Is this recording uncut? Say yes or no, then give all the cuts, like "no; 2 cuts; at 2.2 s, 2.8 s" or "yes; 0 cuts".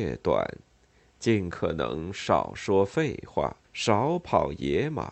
no; 1 cut; at 3.6 s